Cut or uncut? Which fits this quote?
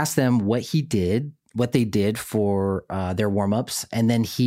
uncut